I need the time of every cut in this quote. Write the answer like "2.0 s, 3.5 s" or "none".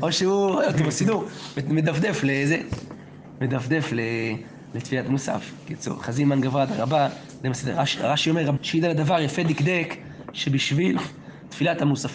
8.6 s